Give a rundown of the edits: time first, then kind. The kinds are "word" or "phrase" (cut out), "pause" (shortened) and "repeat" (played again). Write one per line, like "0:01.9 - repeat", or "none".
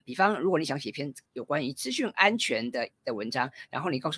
0:01.3 - pause

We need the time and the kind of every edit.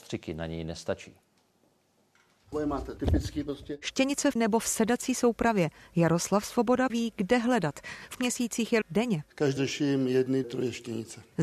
0:02.5 - word
0:03.0 - word
0:04.4 - word
0:06.9 - word
0:08.2 - word
0:08.8 - word
0:09.6 - word
0:10.4 - word

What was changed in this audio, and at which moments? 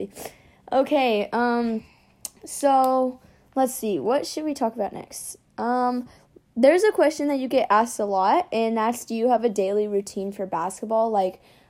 none

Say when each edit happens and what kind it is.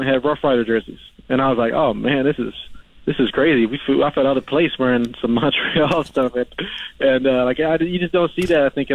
0:02.9 - pause

